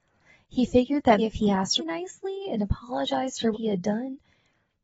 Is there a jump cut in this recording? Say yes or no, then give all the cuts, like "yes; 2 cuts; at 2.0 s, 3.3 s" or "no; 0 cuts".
yes; 3 cuts; at 1.2 s, 1.8 s, 3.5 s